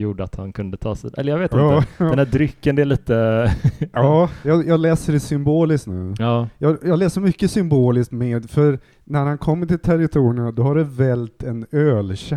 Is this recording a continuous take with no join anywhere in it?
yes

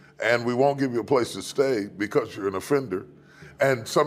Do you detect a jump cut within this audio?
no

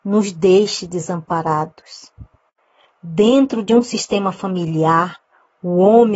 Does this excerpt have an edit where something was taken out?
no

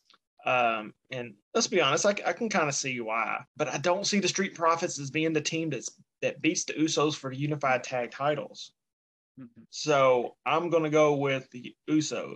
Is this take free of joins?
no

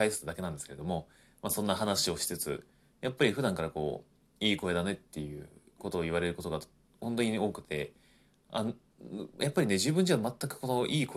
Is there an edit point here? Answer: no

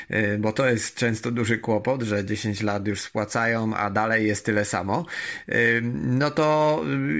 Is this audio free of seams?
yes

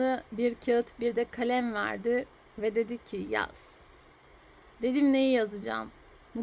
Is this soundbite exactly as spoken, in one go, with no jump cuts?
yes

